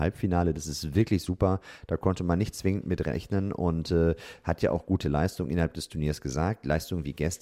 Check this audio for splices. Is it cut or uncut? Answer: uncut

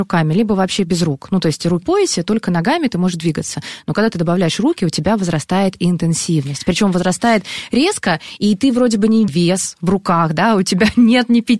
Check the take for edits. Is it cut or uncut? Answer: cut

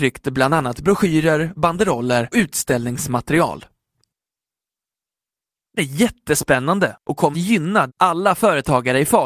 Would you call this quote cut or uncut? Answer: cut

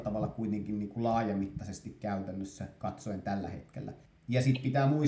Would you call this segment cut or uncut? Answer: cut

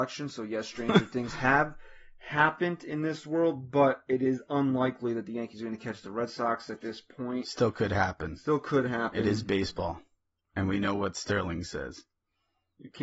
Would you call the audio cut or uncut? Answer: uncut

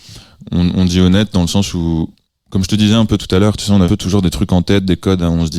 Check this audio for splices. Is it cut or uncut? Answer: cut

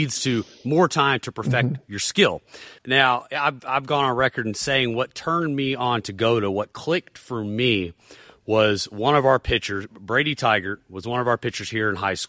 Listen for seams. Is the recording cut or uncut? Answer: cut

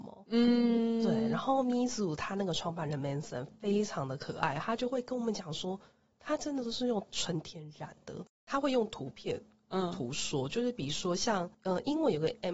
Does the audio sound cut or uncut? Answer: uncut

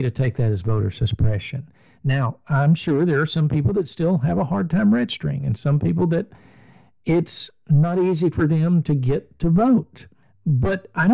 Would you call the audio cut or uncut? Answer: uncut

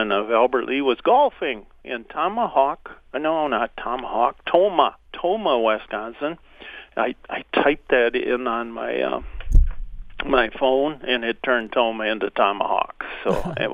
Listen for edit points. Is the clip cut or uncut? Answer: cut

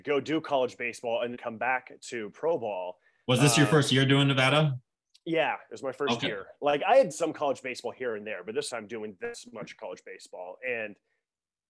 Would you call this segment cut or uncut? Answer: cut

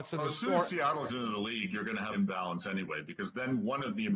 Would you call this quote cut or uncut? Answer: cut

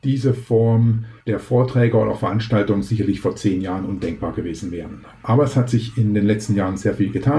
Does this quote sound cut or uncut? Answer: cut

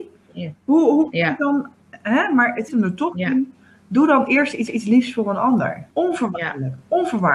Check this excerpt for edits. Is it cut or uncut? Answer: cut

